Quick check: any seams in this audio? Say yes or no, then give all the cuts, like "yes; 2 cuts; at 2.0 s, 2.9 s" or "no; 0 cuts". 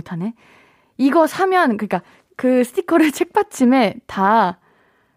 no; 0 cuts